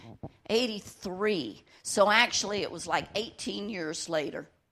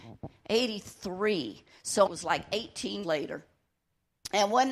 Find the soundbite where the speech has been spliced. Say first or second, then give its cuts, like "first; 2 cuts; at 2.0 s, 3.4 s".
second; 2 cuts; at 2.1 s, 3.0 s